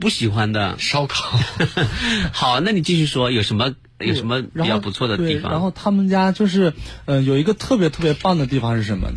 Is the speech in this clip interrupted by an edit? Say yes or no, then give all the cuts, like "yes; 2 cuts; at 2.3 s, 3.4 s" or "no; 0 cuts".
no; 0 cuts